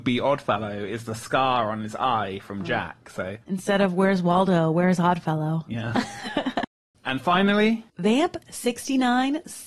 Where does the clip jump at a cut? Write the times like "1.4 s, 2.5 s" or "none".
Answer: 3.4 s, 7.9 s